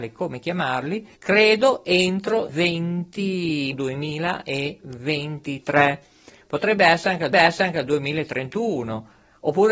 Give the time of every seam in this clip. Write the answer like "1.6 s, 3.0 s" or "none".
1.2 s, 2.5 s, 3.7 s, 7.3 s